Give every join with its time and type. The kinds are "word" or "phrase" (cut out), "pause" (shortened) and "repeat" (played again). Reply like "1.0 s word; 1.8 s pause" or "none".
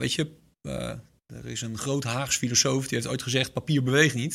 none